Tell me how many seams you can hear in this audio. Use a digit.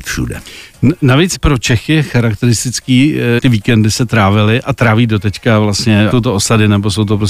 3